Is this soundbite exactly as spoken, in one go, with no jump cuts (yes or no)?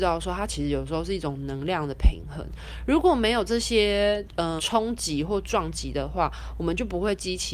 no